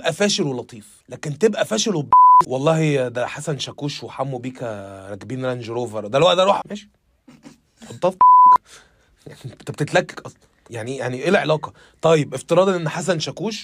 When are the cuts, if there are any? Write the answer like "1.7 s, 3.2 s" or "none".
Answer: 2.4 s, 6.6 s